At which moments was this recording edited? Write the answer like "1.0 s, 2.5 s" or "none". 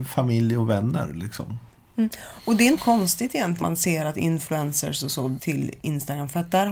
2.8 s, 3.6 s, 5.4 s